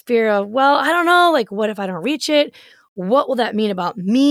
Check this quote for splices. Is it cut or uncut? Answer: uncut